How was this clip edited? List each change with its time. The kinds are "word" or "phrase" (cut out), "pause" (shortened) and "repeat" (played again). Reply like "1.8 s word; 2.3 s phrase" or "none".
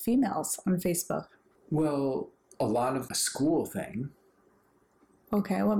3.1 s phrase